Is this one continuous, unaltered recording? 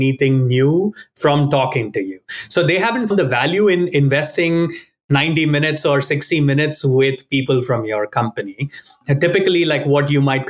no; 1 cut; at 3.1 s

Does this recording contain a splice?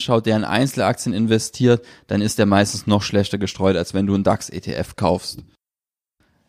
no; 0 cuts

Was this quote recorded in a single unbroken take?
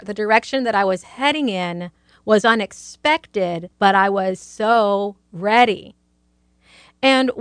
no; 1 cut; at 3.7 s

